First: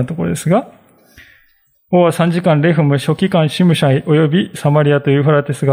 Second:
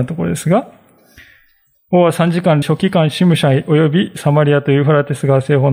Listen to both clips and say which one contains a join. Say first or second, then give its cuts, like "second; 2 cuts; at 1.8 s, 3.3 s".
second; 1 cut; at 2.6 s